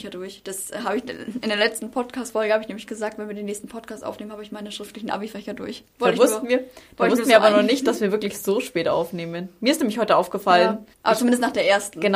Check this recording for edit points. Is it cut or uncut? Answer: cut